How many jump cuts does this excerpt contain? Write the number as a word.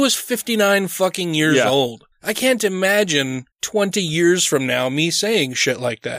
two